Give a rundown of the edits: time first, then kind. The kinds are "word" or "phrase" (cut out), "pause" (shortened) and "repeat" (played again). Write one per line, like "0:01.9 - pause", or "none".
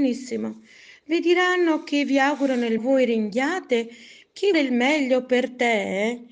0:02.8 - word
0:04.5 - word